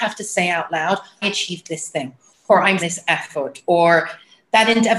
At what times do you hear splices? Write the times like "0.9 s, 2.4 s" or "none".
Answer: 1.2 s, 2.8 s